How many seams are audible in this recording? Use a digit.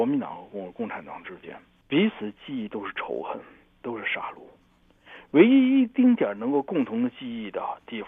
0